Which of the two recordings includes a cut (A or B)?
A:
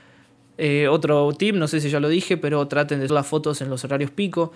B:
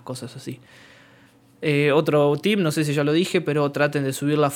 A